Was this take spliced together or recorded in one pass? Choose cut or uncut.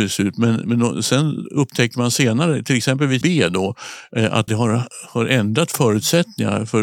cut